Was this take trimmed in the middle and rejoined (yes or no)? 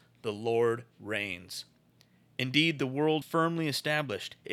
yes